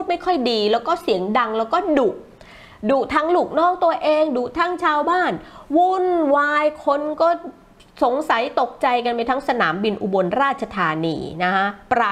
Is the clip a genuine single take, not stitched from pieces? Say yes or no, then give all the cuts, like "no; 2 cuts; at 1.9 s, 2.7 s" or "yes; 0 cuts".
yes; 0 cuts